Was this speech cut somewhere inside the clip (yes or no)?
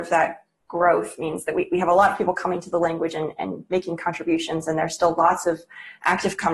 no